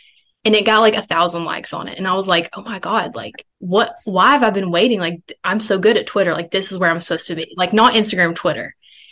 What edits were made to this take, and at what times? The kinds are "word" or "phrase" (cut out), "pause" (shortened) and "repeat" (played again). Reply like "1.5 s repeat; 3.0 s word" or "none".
3.5 s pause